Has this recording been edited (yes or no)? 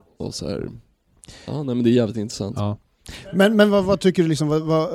no